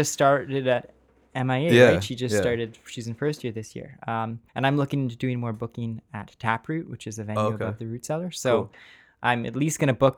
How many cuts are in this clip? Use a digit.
1